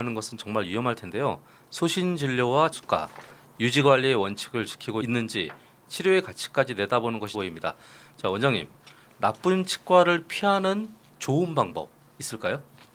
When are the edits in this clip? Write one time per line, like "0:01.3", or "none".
0:02.7
0:07.3

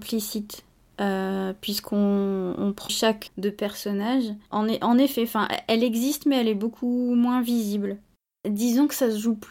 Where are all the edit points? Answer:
0:02.9
0:03.3
0:04.5

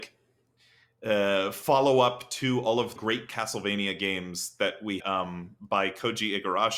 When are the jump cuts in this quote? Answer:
0:03.0
0:05.0

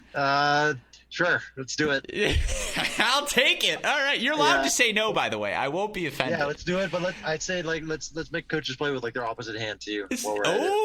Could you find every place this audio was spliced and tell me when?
none

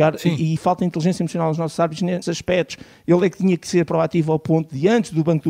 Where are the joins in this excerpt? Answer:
0:02.2

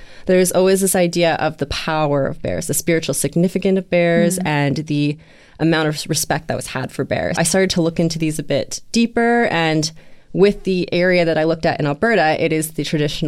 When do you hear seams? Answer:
0:07.4

